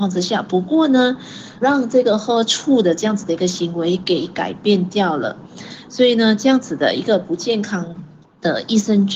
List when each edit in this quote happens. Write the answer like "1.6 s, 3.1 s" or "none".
1.6 s, 8.2 s